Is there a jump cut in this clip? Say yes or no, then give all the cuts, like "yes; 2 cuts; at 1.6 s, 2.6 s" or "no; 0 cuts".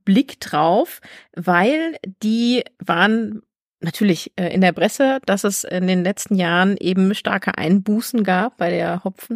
no; 0 cuts